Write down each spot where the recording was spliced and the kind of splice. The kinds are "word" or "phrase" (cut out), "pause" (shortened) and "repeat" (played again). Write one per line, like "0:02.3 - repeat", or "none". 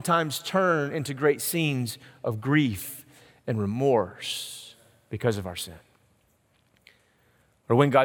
none